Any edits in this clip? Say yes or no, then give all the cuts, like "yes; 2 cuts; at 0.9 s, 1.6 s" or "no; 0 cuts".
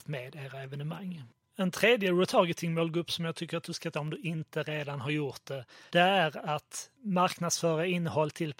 yes; 3 cuts; at 3.9 s, 5.9 s, 6.9 s